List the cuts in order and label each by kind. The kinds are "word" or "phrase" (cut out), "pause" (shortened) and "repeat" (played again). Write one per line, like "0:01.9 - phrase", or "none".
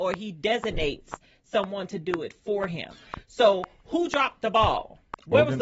none